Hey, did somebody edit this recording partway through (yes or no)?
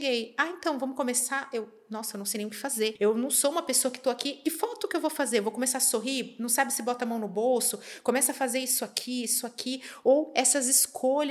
no